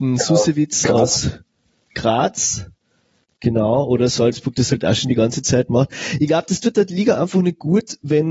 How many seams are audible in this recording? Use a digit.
0